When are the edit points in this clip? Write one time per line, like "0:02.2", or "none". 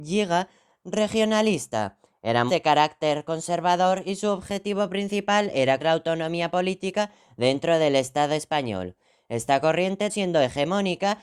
0:02.5
0:05.8
0:10.1